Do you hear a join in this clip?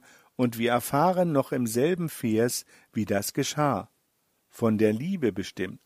no; 0 cuts

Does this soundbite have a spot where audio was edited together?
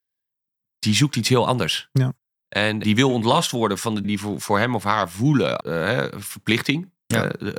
yes; 3 cuts; at 2.8 s, 4.0 s, 5.6 s

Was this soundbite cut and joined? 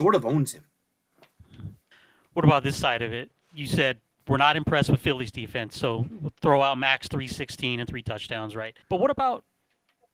yes; 3 cuts; at 1.9 s, 4.1 s, 8.8 s

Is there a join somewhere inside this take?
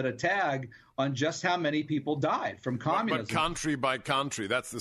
no; 0 cuts

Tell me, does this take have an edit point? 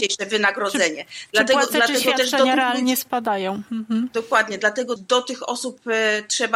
yes; 1 cut; at 5.0 s

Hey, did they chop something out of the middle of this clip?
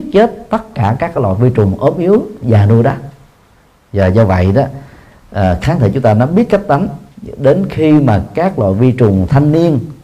no; 0 cuts

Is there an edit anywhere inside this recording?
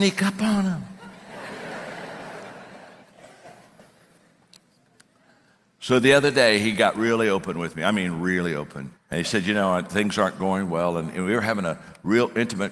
yes; 2 cuts; at 3.0 s, 9.0 s

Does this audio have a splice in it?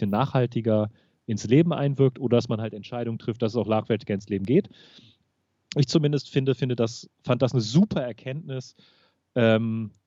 no; 0 cuts

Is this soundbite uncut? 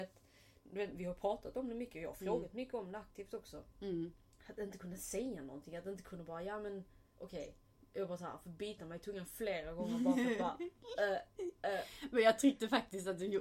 yes; 0 cuts

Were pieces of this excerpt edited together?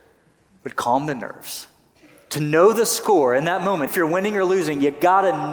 yes; 1 cut; at 3.9 s

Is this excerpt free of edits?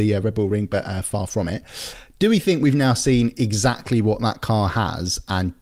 yes; 0 cuts

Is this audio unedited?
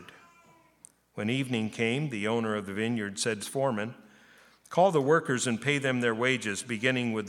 no; 1 cut; at 3.4 s

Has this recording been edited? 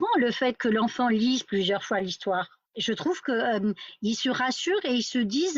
yes; 1 cut; at 2.7 s

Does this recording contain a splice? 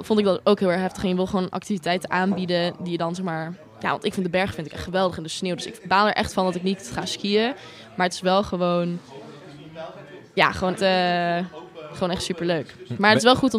yes; 1 cut; at 10.8 s

